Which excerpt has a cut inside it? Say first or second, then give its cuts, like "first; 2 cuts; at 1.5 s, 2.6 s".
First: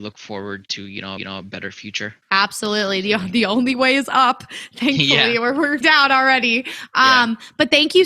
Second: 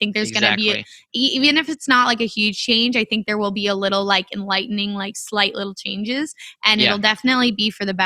first; 3 cuts; at 1.2 s, 2.2 s, 5.8 s